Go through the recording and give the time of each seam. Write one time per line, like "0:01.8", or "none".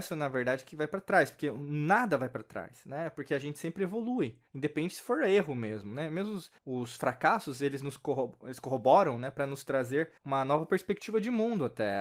0:04.5
0:06.6
0:10.2